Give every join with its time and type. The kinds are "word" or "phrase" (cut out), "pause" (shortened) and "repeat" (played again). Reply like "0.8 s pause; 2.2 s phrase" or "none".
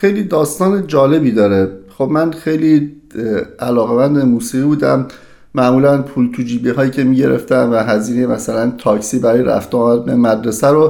none